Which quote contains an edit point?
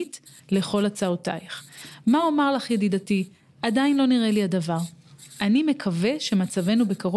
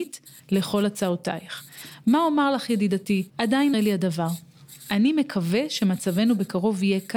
second; 2 cuts; at 3.3 s, 3.7 s

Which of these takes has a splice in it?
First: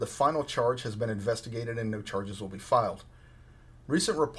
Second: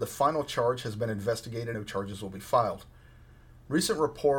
second; 1 cut; at 1.7 s

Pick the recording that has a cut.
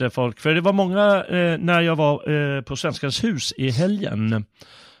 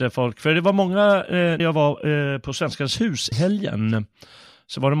second; 2 cuts; at 1.6 s, 3.3 s

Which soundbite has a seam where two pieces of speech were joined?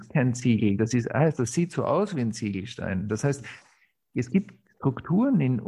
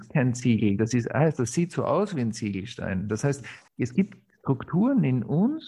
second; 1 cut; at 3.7 s

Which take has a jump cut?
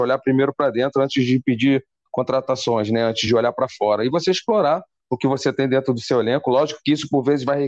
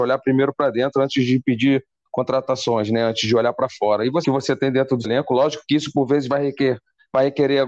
second; 2 cuts; at 4.2 s, 5.0 s

